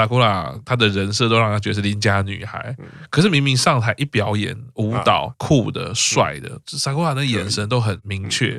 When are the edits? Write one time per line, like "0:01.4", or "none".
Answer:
0:05.3